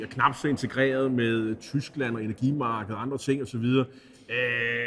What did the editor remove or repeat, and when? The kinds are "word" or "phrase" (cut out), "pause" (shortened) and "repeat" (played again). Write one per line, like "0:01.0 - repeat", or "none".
none